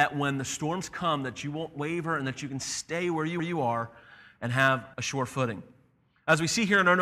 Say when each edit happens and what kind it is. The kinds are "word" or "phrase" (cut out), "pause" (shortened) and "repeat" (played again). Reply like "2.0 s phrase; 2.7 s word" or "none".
3.4 s repeat; 4.9 s pause

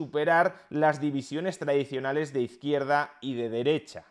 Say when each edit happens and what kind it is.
none

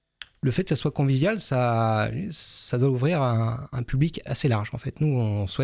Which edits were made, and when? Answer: 4.3 s word

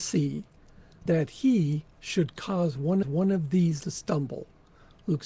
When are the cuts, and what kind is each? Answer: 1.1 s word; 1.9 s pause; 3.0 s repeat; 3.8 s phrase

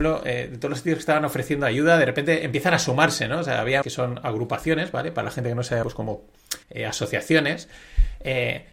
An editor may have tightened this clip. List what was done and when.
3.8 s phrase; 5.8 s word; 6.6 s pause

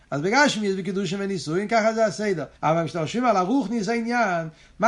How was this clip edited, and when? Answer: 2.6 s pause

